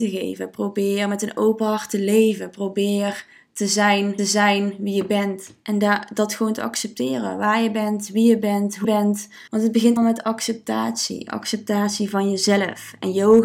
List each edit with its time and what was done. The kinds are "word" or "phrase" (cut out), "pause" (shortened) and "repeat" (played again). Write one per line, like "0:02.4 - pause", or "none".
0:04.2 - repeat
0:08.8 - word
0:09.5 - pause
0:10.0 - word

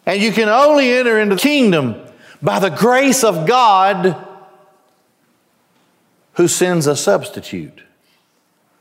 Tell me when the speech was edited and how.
0:01.4 - word

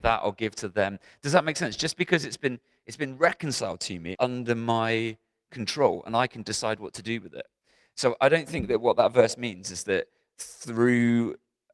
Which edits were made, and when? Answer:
0:04.1 - phrase

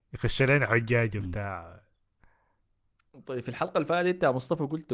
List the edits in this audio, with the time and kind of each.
none

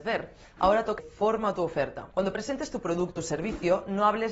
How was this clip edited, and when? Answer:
0:01.0 - word
0:03.2 - word

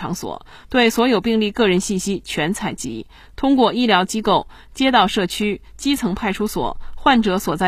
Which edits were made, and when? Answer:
none

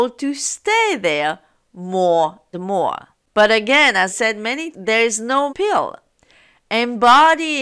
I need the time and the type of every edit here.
0:02.5 - word
0:04.1 - word
0:04.7 - word
0:05.5 - word

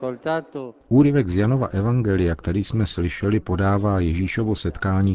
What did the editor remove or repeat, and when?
none

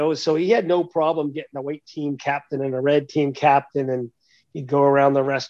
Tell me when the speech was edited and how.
none

